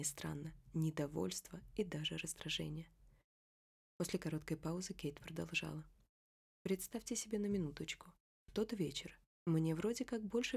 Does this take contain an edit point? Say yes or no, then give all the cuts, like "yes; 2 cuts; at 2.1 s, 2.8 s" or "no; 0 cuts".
no; 0 cuts